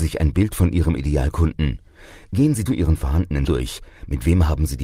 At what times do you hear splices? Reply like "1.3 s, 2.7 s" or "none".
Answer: 2.7 s, 3.5 s